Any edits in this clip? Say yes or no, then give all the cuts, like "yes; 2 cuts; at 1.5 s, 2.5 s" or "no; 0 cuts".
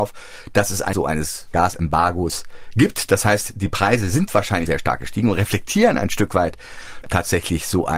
yes; 3 cuts; at 0.9 s, 4.7 s, 7.0 s